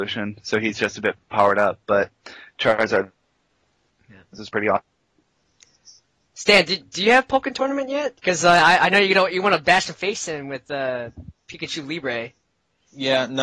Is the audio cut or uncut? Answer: uncut